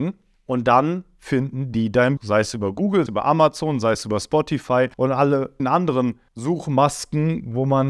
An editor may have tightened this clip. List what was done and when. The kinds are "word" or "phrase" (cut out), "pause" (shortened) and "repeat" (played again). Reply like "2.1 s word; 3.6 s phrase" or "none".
2.2 s word; 3.1 s phrase; 3.9 s phrase; 4.9 s pause; 5.6 s word; 6.3 s pause